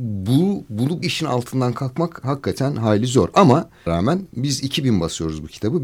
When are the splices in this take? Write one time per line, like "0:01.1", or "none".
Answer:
0:01.0
0:02.2
0:03.9